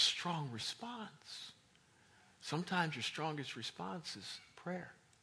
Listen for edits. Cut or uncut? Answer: uncut